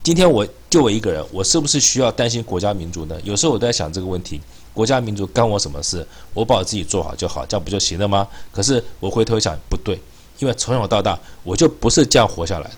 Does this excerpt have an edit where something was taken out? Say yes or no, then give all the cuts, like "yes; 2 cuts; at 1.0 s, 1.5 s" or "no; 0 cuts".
no; 0 cuts